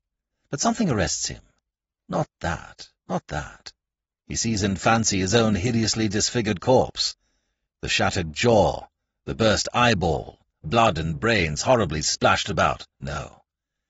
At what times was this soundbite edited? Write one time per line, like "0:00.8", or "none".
none